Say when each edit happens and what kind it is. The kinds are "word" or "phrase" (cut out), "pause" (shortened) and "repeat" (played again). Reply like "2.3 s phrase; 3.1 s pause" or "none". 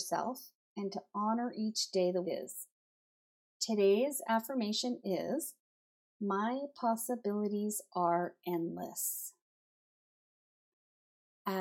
2.2 s word